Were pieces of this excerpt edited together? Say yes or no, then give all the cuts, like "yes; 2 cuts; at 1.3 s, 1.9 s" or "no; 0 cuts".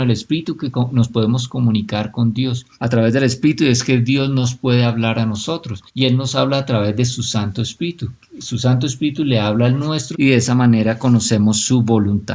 yes; 3 cuts; at 2.7 s, 5.9 s, 10.1 s